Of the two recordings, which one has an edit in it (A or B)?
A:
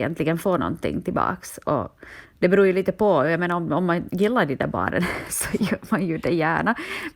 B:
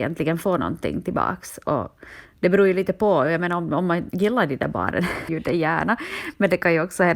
B